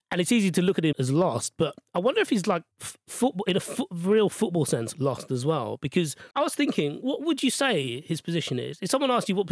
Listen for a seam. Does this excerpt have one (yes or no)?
yes